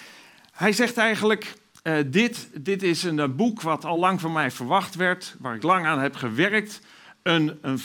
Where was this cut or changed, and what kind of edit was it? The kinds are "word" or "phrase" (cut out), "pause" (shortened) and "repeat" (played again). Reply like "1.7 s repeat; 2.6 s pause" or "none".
none